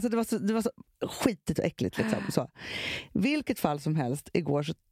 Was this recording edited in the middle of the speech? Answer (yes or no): no